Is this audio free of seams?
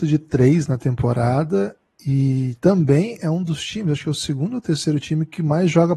yes; 0 cuts

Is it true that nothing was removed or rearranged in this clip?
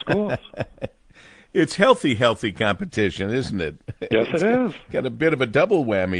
yes; 0 cuts

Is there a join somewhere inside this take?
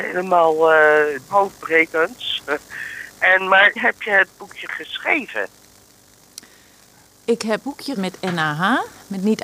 yes; 4 cuts; at 1.3 s, 3.8 s, 7.6 s, 8.0 s

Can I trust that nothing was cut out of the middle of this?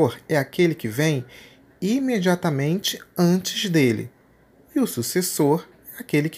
yes; 0 cuts

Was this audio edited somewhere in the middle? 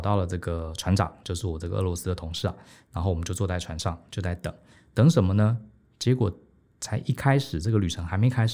no; 0 cuts

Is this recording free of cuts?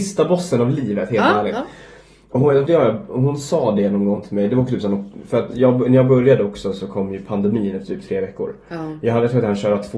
no; 1 cut; at 2.7 s

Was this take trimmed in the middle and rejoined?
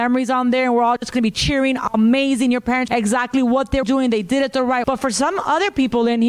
yes; 3 cuts; at 2.9 s, 3.8 s, 4.8 s

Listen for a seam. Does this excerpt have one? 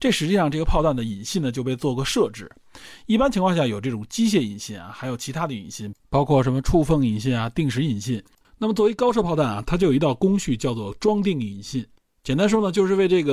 no; 0 cuts

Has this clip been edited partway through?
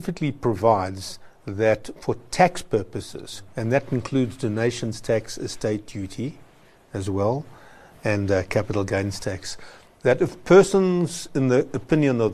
no; 0 cuts

